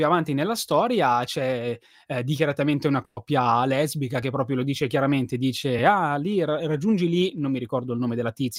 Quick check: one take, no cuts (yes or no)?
yes